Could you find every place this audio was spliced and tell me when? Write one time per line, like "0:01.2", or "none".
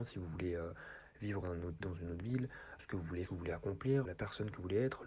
0:01.4
0:01.8
0:02.8
0:03.3
0:04.1